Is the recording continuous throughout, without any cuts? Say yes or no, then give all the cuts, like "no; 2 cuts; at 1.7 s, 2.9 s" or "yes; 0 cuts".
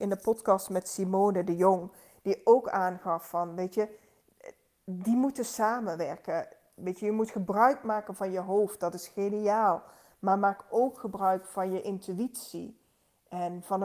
yes; 0 cuts